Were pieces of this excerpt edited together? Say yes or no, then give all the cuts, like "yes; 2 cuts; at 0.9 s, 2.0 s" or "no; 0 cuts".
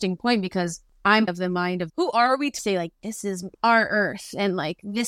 yes; 3 cuts; at 1.3 s, 1.9 s, 2.6 s